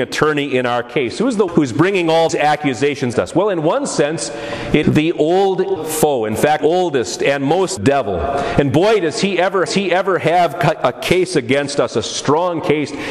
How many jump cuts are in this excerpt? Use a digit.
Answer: 8